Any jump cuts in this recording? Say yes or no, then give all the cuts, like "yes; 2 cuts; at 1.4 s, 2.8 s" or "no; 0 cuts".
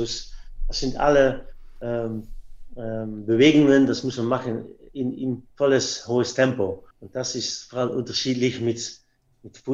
yes; 2 cuts; at 5.5 s, 6.9 s